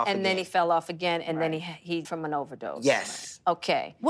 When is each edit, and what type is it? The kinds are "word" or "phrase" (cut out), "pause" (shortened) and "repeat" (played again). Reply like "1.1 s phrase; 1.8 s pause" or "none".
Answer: 2.0 s word